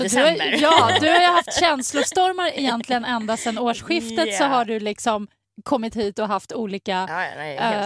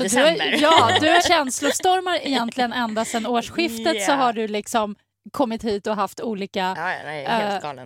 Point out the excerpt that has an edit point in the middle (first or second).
second